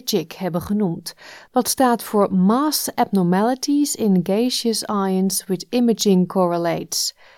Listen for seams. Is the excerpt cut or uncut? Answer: uncut